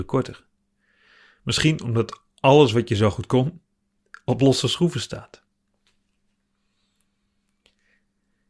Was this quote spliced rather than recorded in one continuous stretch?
no; 0 cuts

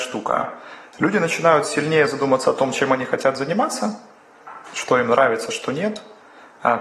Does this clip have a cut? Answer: no; 0 cuts

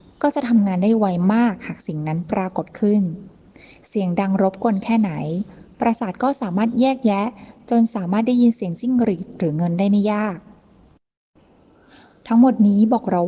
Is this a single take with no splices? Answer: yes; 0 cuts

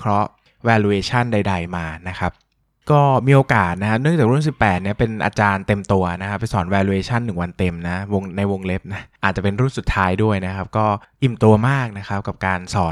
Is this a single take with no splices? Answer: yes; 0 cuts

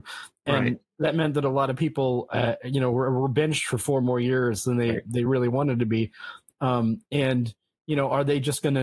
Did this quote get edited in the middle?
no; 0 cuts

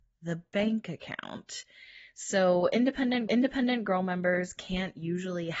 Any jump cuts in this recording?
yes; 1 cut; at 3.3 s

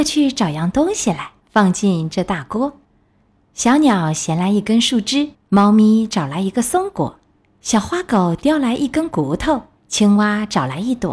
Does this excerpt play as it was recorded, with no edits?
no; 5 cuts; at 1.4 s, 2.8 s, 5.3 s, 7.3 s, 9.8 s

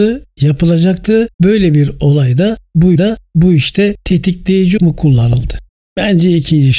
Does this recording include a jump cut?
yes; 4 cuts; at 1.3 s, 2.9 s, 4.8 s, 5.7 s

